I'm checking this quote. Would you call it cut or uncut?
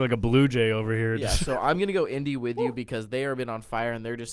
uncut